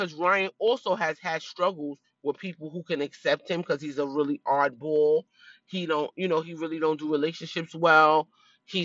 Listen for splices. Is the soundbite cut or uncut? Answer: uncut